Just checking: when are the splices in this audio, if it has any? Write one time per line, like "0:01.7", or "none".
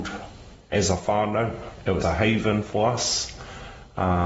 0:02.0